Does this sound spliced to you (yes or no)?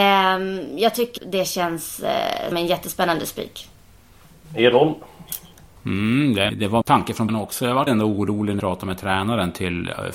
yes